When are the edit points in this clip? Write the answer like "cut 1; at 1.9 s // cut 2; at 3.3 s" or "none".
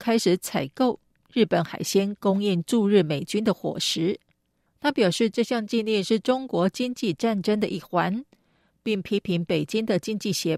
none